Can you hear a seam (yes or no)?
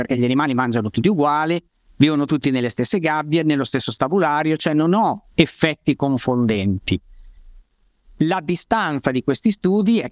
no